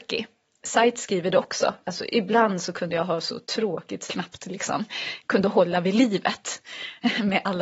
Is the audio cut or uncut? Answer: cut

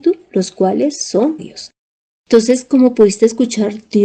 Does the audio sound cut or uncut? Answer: cut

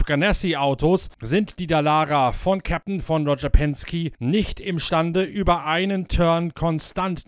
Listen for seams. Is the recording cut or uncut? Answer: uncut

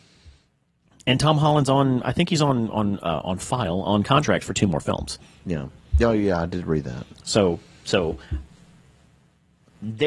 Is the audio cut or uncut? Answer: uncut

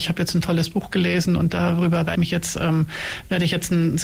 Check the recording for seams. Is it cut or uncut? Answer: cut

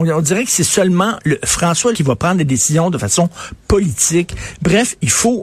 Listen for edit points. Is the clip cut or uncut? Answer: cut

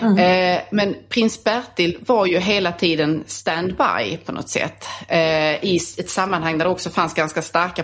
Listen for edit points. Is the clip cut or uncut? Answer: uncut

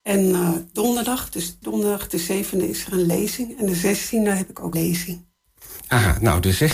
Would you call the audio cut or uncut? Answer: cut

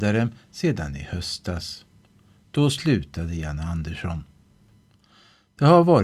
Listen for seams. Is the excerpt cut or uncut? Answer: uncut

